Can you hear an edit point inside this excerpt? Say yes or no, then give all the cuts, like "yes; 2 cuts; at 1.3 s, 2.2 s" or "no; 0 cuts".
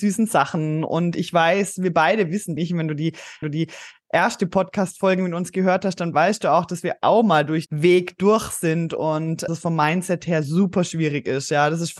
yes; 4 cuts; at 2.6 s, 3.4 s, 7.7 s, 9.5 s